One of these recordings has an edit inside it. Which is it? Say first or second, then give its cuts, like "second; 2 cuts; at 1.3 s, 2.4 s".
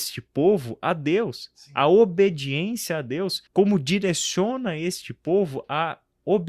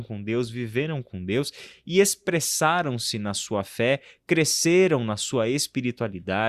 first; 1 cut; at 3.5 s